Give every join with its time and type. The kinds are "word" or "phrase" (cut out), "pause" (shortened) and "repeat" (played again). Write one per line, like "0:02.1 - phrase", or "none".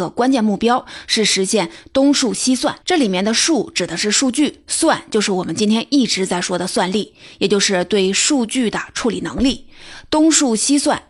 0:02.8 - pause